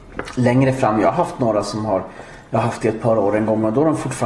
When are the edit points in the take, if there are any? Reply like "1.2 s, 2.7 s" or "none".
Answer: none